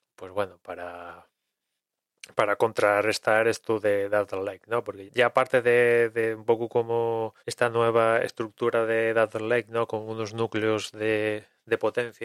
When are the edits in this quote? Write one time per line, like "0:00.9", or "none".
0:05.1
0:07.4